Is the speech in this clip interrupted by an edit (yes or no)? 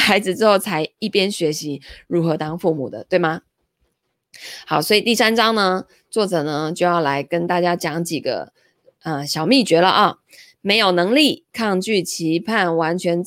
no